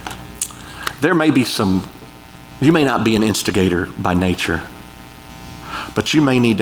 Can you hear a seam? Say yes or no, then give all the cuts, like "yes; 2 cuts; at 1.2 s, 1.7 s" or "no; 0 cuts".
no; 0 cuts